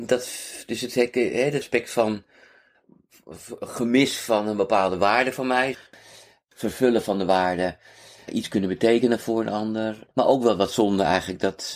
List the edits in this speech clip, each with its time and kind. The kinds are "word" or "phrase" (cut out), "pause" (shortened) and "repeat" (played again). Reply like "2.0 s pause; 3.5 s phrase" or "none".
1.6 s phrase; 10.1 s pause